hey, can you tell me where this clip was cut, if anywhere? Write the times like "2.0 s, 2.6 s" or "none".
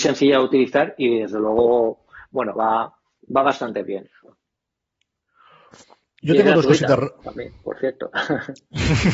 none